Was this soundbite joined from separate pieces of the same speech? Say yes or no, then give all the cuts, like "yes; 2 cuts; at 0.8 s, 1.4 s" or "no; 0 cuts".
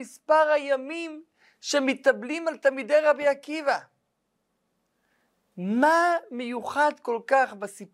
no; 0 cuts